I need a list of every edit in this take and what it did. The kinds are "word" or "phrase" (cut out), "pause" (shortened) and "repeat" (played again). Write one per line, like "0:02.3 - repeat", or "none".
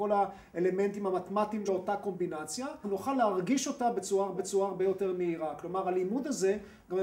0:01.7 - word
0:02.8 - word
0:04.3 - repeat